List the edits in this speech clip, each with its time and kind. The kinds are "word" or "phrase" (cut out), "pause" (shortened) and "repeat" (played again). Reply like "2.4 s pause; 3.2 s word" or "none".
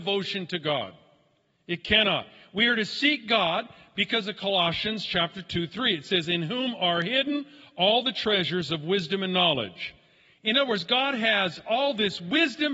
none